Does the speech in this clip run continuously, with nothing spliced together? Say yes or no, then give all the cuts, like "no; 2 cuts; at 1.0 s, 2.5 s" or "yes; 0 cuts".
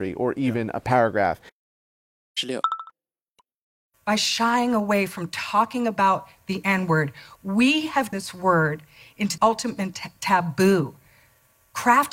no; 2 cuts; at 8.1 s, 9.4 s